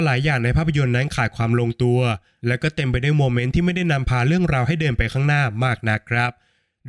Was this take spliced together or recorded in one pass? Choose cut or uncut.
uncut